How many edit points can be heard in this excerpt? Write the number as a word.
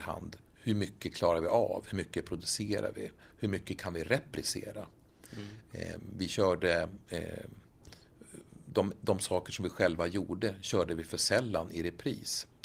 zero